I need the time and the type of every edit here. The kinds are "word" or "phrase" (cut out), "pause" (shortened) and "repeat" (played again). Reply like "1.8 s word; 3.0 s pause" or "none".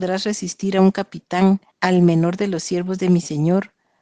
1.7 s pause